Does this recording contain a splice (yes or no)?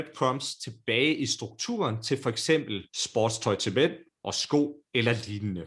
yes